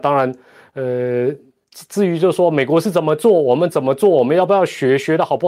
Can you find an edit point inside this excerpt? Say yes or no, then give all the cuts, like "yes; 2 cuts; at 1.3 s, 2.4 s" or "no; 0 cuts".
no; 0 cuts